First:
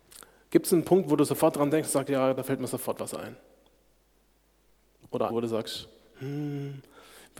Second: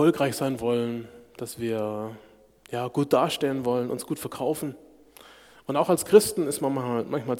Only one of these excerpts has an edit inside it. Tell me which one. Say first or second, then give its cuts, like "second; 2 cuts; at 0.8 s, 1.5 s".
first; 1 cut; at 5.3 s